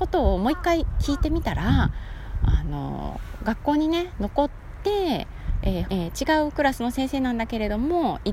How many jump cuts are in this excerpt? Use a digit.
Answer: 1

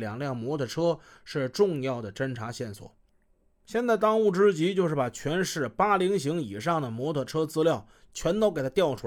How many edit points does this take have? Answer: 0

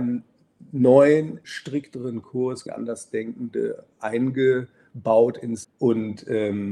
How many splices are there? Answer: 3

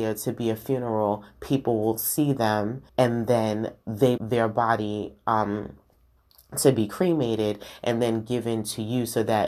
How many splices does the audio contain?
2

